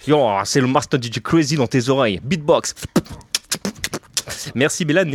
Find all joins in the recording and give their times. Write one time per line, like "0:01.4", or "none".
none